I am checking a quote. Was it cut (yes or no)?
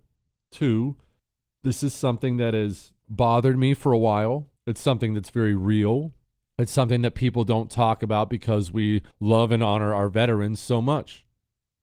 yes